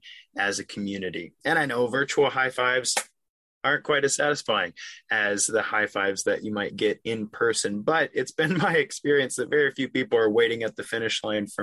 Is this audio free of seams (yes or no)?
yes